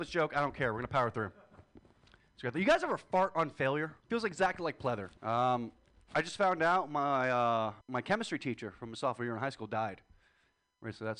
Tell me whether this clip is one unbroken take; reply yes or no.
no